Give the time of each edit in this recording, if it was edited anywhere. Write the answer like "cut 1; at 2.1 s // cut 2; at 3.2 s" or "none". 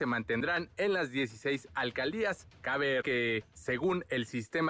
cut 1; at 3.0 s